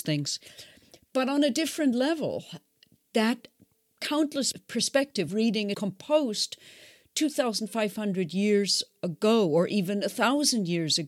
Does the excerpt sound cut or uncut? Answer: cut